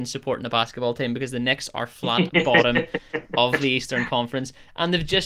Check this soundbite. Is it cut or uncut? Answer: uncut